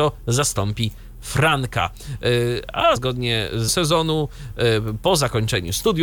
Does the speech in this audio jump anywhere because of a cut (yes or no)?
yes